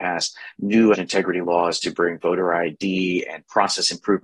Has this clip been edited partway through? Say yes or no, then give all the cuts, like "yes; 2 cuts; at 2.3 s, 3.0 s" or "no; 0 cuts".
yes; 1 cut; at 0.9 s